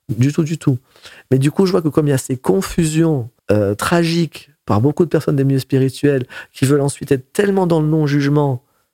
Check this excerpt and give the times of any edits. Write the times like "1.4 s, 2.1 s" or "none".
3.4 s

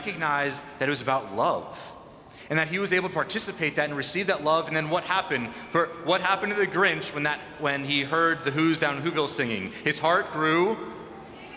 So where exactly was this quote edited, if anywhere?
none

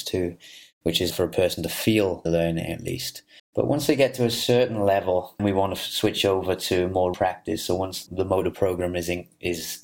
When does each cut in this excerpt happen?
1.1 s, 2.3 s, 3.4 s, 5.4 s, 7.1 s, 8.1 s

